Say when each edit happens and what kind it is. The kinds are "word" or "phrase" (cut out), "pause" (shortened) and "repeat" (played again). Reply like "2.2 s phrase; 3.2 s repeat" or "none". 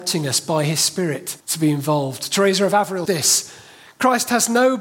1.4 s pause; 3.1 s word